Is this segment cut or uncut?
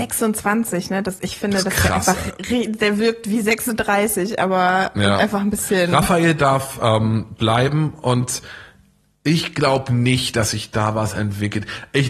uncut